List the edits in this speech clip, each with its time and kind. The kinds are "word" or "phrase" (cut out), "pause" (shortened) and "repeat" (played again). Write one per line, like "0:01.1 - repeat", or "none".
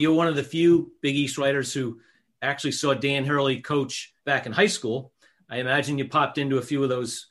0:04.2 - pause